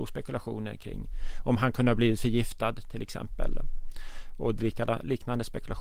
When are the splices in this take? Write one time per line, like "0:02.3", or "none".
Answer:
none